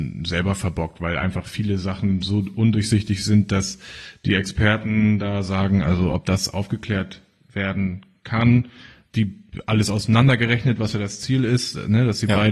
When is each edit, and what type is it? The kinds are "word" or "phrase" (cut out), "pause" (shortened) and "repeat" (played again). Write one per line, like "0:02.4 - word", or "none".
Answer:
none